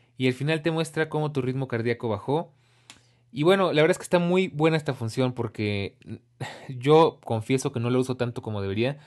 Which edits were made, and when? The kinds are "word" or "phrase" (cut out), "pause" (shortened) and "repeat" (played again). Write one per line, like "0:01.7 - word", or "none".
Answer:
none